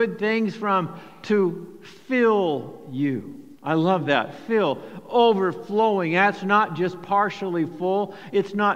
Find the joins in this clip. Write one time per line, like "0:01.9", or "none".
0:03.5